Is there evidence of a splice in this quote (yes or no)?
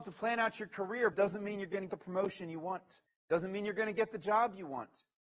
yes